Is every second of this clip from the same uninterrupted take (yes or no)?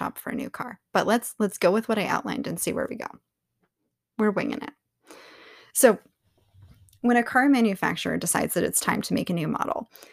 yes